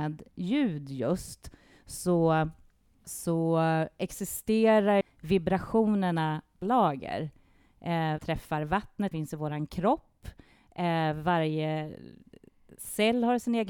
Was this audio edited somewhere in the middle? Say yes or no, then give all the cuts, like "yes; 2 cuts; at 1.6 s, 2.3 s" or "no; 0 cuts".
yes; 5 cuts; at 3.0 s, 5.0 s, 6.6 s, 8.2 s, 9.1 s